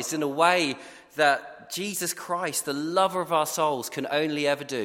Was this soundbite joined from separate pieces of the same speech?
no; 0 cuts

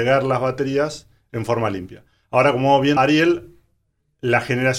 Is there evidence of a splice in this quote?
yes; 1 cut; at 3.0 s

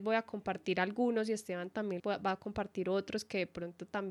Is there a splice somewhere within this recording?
yes; 1 cut; at 2.0 s

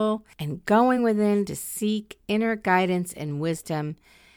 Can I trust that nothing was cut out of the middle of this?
yes; 0 cuts

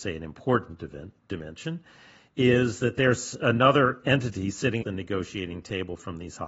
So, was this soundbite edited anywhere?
yes; 1 cut; at 4.8 s

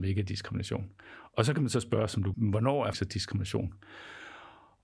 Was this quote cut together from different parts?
yes; 2 cuts; at 2.3 s, 2.9 s

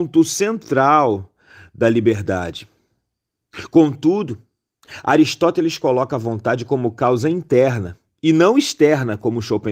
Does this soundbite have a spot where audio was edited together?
no; 0 cuts

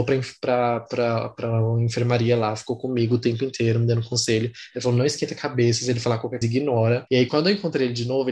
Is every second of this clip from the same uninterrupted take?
no; 2 cuts; at 6.4 s, 7.3 s

